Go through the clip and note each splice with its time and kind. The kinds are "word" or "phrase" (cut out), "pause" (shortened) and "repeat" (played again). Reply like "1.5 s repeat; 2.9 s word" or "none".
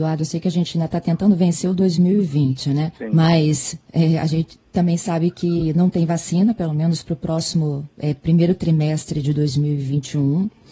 3.0 s pause